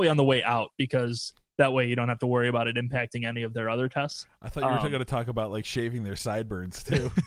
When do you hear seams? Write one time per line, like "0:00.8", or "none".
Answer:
none